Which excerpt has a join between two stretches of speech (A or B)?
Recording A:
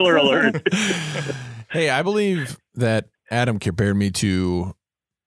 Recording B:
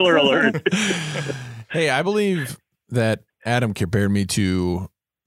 A